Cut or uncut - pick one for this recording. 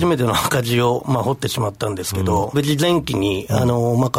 cut